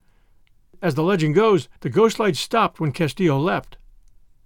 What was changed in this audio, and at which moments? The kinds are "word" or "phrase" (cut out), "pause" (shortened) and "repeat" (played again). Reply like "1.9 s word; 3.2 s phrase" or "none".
1.8 s pause